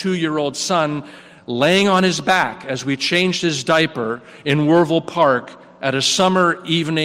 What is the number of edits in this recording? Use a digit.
0